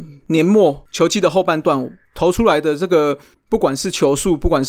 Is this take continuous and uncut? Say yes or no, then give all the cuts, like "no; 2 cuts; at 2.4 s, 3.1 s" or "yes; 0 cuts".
no; 1 cut; at 3.3 s